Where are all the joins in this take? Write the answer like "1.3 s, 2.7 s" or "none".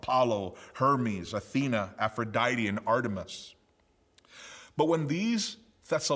none